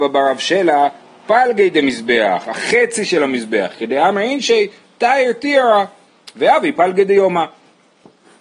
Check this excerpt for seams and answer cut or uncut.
uncut